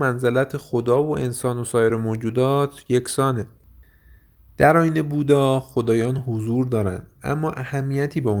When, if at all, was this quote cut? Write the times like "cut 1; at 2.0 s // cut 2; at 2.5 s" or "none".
none